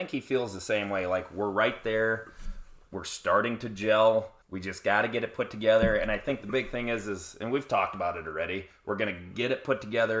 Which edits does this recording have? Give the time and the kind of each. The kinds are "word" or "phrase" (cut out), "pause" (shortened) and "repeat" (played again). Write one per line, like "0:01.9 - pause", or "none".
0:02.8 - pause
0:04.4 - pause